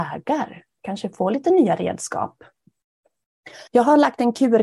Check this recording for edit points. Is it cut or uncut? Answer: cut